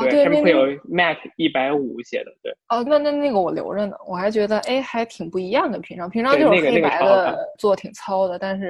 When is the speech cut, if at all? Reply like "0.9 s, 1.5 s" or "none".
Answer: 2.9 s, 7.5 s